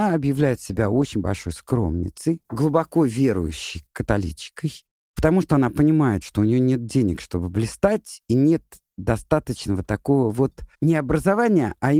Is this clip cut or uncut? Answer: uncut